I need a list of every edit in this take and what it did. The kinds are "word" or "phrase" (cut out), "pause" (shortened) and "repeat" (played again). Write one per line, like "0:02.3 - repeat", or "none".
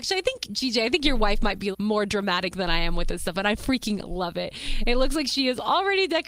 0:01.7 - word